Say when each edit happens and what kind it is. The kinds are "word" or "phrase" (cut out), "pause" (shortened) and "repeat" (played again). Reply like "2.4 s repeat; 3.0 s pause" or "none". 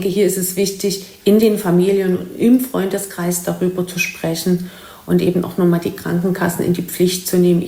none